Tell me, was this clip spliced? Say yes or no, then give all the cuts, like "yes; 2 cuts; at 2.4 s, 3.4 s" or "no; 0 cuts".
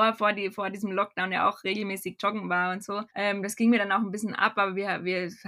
yes; 1 cut; at 3.1 s